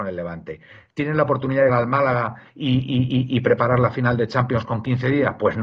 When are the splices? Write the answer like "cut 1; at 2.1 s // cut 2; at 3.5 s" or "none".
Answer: cut 1; at 1.7 s